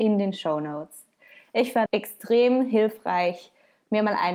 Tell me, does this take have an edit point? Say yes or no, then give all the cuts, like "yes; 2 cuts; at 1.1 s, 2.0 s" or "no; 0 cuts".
yes; 1 cut; at 1.9 s